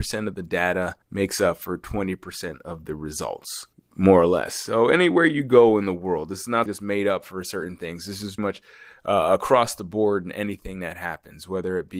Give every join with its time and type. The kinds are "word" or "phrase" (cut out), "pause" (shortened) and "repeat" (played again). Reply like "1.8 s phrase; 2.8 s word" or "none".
1.0 s pause; 3.7 s pause; 6.7 s word; 8.4 s word